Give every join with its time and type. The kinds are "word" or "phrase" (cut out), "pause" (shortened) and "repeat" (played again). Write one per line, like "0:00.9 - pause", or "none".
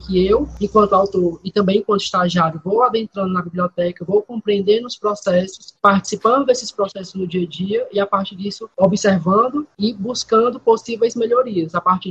none